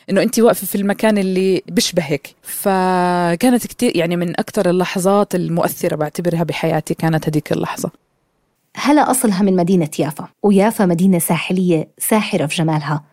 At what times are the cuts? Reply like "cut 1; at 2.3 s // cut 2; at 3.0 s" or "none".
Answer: cut 1; at 2.4 s // cut 2; at 8.6 s // cut 3; at 10.3 s

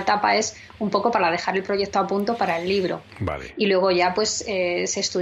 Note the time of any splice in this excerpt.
none

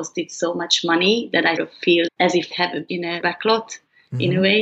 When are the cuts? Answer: cut 1; at 1.6 s // cut 2; at 2.1 s // cut 3; at 2.5 s // cut 4; at 2.9 s // cut 5; at 3.2 s

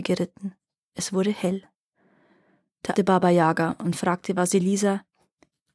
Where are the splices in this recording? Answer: cut 1; at 3.0 s

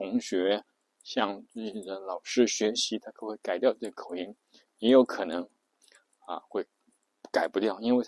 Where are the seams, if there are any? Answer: none

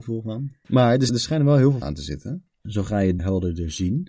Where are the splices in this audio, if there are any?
cut 1; at 1.1 s // cut 2; at 1.8 s // cut 3; at 3.2 s

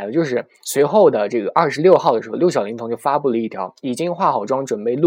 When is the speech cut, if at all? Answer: none

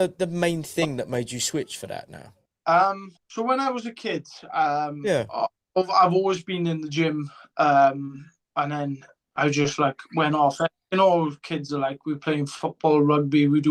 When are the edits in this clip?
cut 1; at 3.2 s

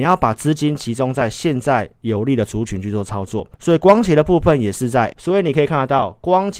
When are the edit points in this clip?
cut 1; at 3.5 s // cut 2; at 5.1 s

